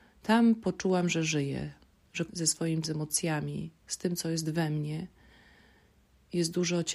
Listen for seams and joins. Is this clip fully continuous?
no; 2 cuts; at 2.3 s, 2.8 s

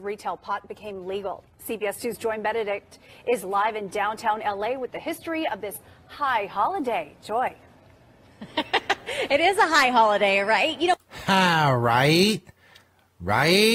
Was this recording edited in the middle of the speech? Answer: no; 0 cuts

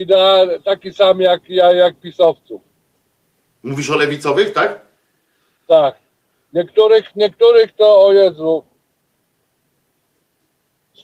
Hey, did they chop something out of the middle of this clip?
no; 0 cuts

